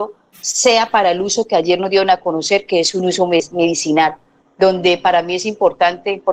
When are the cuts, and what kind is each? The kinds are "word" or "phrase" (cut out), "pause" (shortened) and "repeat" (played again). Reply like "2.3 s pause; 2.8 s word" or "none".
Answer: none